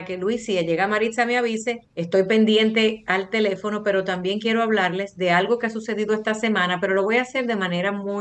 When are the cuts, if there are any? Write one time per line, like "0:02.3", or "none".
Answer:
0:01.8